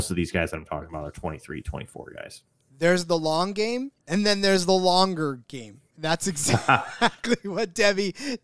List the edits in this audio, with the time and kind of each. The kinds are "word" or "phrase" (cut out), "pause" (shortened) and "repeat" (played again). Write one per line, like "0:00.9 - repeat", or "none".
0:04.0 - pause